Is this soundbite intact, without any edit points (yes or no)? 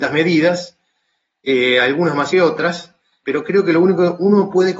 no